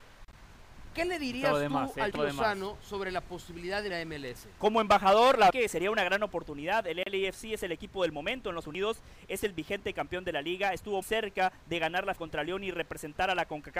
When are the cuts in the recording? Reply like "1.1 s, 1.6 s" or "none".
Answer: 2.1 s, 3.9 s, 5.5 s, 8.6 s, 11.0 s, 12.2 s